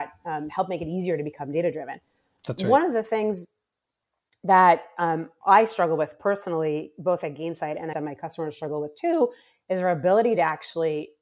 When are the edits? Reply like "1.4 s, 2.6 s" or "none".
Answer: 7.9 s